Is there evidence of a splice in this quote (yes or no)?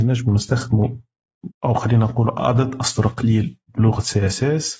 yes